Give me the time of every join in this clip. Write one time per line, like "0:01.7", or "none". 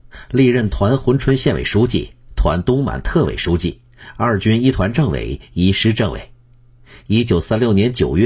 none